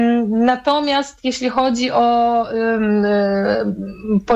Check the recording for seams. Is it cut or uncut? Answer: uncut